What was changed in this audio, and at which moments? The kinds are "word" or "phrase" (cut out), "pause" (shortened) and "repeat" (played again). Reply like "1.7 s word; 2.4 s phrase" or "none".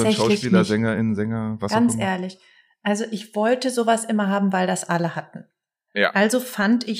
none